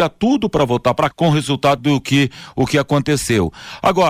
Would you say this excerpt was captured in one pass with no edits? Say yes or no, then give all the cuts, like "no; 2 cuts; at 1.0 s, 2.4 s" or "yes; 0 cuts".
no; 2 cuts; at 1.1 s, 1.8 s